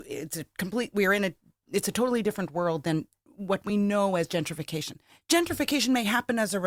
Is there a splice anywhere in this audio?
no; 0 cuts

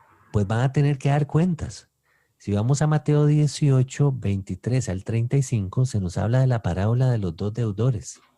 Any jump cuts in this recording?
no; 0 cuts

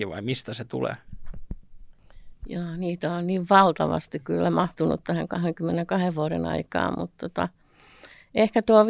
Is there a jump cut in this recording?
no; 0 cuts

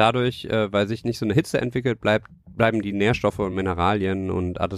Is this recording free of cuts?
yes; 0 cuts

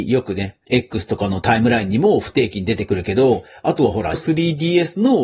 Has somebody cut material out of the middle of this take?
yes; 1 cut; at 4.1 s

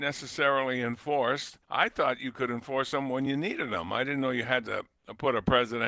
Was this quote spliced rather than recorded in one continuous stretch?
yes; 1 cut; at 1.6 s

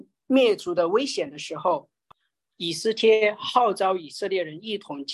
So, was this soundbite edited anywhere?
no; 0 cuts

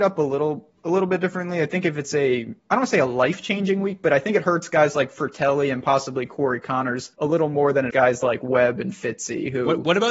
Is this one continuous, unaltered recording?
no; 3 cuts; at 2.6 s, 7.1 s, 7.9 s

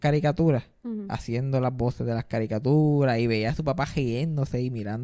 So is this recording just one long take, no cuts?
yes; 0 cuts

